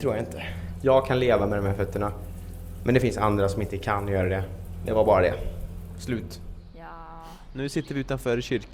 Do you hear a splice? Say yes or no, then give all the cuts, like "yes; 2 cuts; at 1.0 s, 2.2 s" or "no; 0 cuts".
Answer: no; 0 cuts